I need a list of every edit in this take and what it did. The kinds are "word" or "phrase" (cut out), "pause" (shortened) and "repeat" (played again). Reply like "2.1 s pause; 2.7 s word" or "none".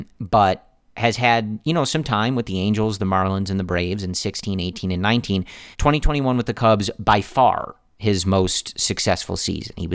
5.7 s pause